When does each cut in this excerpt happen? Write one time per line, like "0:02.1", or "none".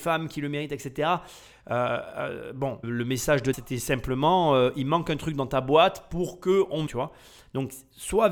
0:02.8
0:03.5
0:06.9